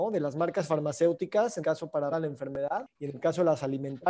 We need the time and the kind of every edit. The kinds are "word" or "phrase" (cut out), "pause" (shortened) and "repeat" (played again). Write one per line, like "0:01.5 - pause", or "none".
0:01.6 - word
0:02.1 - word

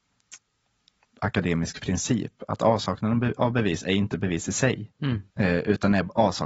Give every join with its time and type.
0:05.3 - pause

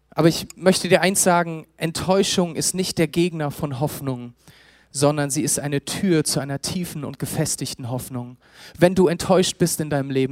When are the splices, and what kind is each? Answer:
none

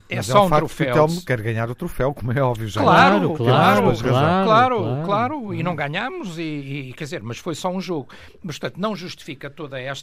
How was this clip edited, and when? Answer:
none

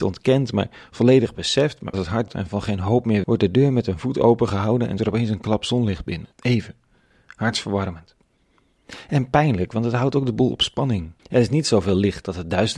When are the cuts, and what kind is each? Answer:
0:01.9 - word
0:02.3 - word
0:03.2 - phrase
0:05.0 - word
0:06.3 - pause
0:11.2 - pause

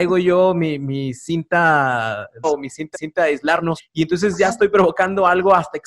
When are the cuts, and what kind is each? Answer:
0:02.4 - word
0:02.9 - repeat
0:03.8 - word

